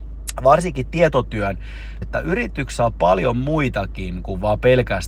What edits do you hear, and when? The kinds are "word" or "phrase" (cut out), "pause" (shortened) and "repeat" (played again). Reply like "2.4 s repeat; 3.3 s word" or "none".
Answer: 2.0 s word